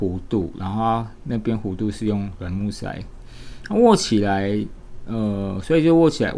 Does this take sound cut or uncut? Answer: uncut